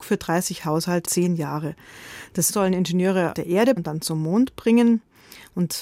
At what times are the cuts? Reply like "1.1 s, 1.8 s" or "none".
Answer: 1.0 s, 2.5 s, 3.3 s, 3.8 s